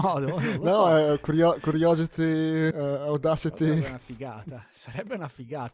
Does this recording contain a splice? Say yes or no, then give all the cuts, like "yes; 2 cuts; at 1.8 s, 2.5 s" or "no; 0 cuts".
yes; 1 cut; at 2.7 s